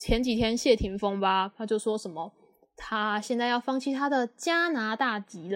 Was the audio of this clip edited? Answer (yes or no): no